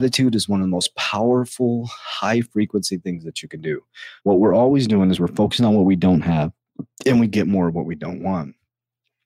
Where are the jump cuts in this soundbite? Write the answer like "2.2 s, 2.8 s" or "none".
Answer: 4.2 s, 6.9 s